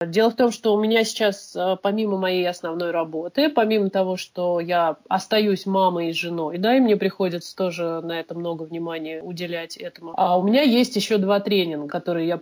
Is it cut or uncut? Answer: uncut